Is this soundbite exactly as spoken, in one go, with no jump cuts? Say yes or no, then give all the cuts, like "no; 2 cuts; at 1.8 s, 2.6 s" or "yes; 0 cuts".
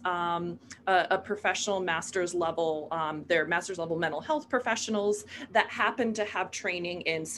yes; 0 cuts